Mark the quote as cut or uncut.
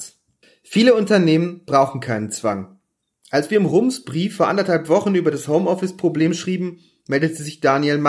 uncut